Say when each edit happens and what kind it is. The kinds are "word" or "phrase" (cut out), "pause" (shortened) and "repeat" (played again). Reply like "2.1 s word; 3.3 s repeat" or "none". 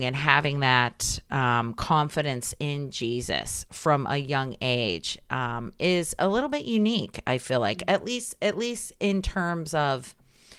none